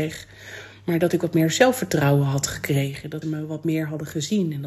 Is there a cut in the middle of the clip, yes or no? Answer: yes